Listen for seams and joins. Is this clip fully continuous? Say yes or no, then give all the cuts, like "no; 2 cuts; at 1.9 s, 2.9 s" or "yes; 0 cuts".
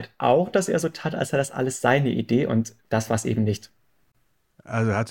no; 1 cut; at 2.8 s